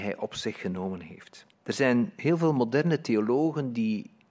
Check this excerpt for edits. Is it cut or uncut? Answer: cut